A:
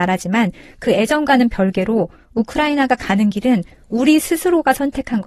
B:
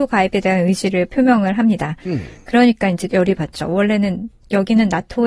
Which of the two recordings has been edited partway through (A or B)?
B